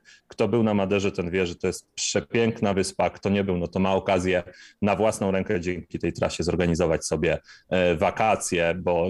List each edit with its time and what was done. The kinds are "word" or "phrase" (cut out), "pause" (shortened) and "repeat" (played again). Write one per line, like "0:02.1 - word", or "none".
none